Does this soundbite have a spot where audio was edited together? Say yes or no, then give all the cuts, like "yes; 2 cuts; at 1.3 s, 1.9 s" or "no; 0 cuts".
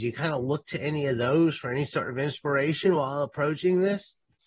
no; 0 cuts